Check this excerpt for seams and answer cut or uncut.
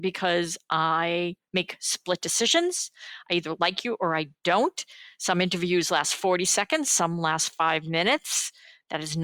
uncut